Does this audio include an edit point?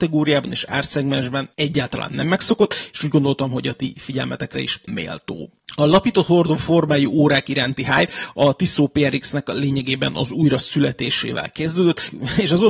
yes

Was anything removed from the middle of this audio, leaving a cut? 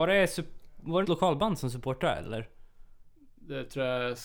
yes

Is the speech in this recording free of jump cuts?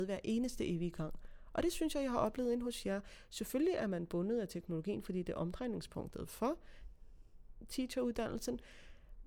yes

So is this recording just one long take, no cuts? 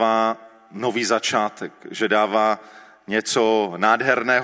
yes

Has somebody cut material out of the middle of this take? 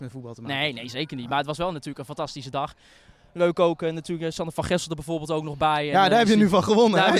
no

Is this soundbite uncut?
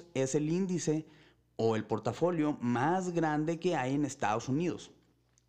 yes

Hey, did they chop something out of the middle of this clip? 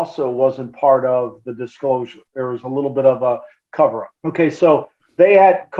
yes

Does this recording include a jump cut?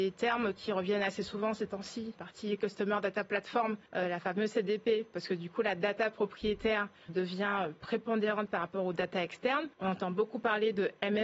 yes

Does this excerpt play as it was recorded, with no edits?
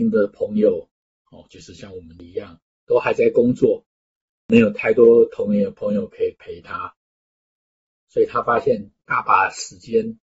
yes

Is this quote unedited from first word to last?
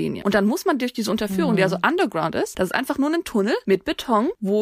yes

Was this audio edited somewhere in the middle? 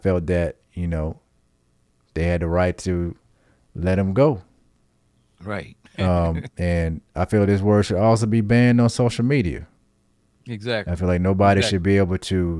no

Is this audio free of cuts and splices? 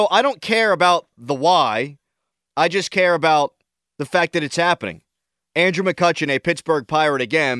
yes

